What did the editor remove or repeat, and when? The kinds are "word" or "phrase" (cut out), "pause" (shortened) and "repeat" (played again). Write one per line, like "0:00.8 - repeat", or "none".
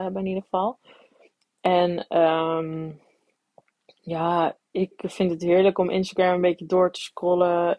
0:04.7 - pause